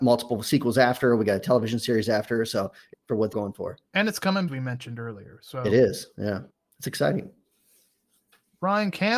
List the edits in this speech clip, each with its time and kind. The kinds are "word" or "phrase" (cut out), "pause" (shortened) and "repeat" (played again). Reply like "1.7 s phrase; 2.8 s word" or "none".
2.9 s phrase; 3.3 s word; 3.9 s pause; 4.5 s phrase; 6.5 s pause